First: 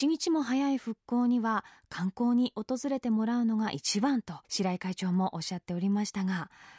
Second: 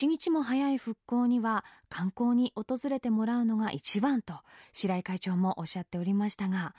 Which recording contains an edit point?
first; 1 cut; at 4.4 s

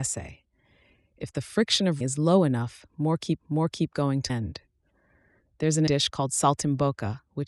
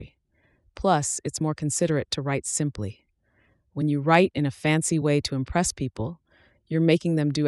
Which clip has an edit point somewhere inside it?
first; 4 cuts; at 2.0 s, 3.4 s, 4.3 s, 5.9 s

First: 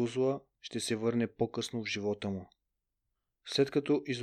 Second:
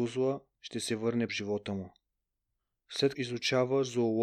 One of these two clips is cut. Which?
second; 2 cuts; at 1.3 s, 3.1 s

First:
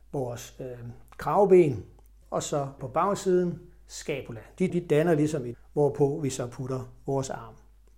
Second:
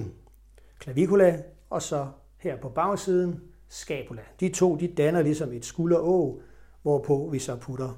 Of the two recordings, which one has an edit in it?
first; 4 cuts; at 2.2 s, 2.8 s, 4.7 s, 5.5 s

